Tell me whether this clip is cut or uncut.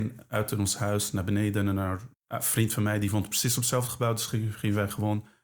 cut